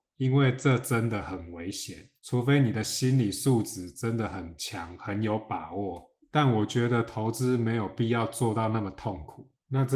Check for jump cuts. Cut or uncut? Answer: cut